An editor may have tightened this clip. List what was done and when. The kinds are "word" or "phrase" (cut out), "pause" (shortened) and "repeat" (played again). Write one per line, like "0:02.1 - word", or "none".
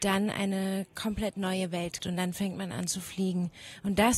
0:02.0 - word